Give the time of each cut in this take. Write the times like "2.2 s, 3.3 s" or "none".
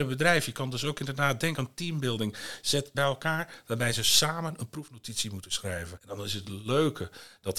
2.9 s